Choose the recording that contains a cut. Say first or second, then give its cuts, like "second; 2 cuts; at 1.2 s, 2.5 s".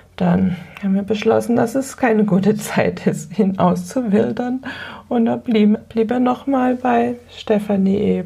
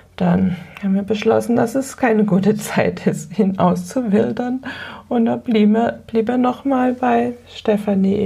first; 1 cut; at 5.8 s